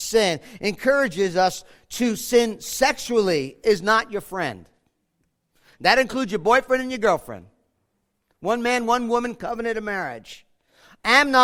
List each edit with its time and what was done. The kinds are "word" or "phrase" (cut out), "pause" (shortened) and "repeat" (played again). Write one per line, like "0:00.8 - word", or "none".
none